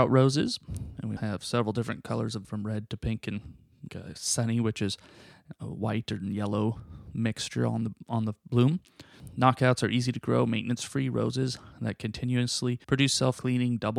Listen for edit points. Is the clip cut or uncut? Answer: cut